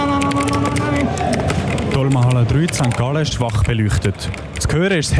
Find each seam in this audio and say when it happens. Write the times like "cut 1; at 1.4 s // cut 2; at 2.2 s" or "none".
cut 1; at 3.3 s